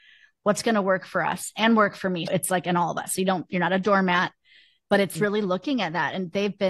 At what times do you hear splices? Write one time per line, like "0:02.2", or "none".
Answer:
0:02.3